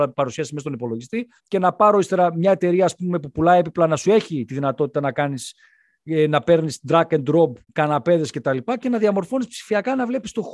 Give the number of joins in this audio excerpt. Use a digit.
2